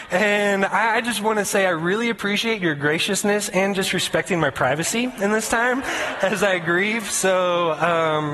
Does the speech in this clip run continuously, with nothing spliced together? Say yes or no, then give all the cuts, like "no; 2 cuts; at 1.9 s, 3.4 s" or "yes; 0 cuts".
yes; 0 cuts